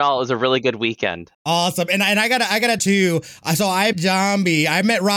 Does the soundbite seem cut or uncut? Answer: cut